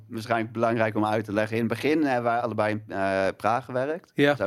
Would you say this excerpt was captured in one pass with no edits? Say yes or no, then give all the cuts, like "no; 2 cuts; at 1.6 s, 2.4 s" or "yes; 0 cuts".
no; 1 cut; at 2.4 s